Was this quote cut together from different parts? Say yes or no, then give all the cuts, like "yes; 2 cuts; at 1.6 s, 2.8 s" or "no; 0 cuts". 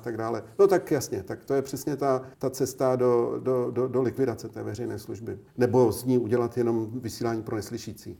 yes; 2 cuts; at 2.3 s, 5.5 s